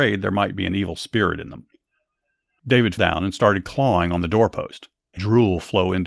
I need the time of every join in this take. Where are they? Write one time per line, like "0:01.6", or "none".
0:03.0
0:05.2